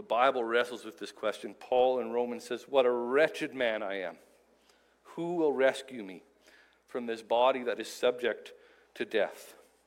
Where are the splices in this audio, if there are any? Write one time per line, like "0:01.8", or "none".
none